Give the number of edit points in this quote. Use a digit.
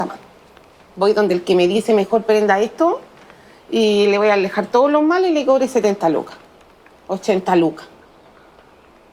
0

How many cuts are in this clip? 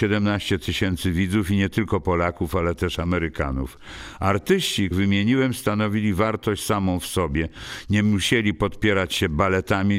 1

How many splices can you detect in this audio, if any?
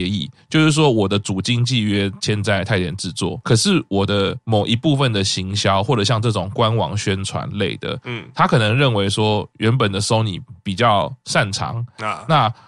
1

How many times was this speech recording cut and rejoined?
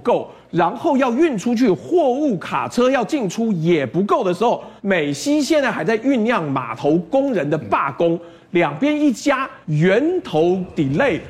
2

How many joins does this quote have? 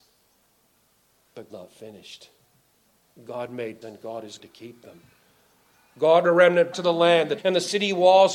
6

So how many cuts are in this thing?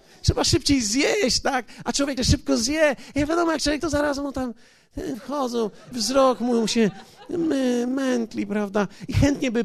4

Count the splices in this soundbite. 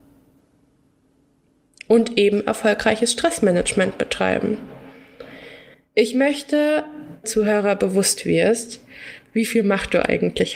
2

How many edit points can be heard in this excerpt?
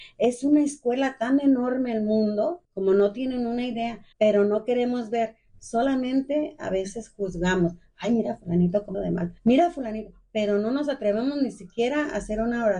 4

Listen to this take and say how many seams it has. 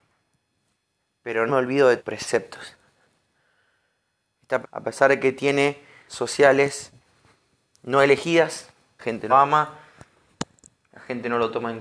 6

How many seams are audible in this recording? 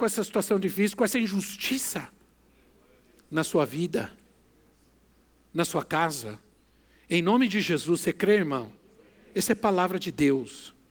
0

